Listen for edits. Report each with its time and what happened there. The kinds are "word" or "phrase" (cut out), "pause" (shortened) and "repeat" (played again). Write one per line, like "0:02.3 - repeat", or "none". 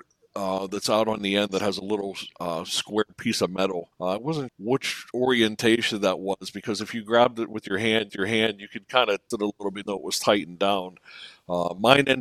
0:03.9 - pause
0:04.5 - word
0:08.1 - repeat
0:09.3 - word
0:09.8 - word